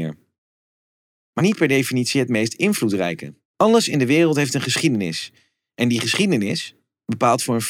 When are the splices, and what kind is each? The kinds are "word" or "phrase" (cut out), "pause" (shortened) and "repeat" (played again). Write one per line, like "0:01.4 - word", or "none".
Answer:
0:01.4 - phrase
0:03.4 - pause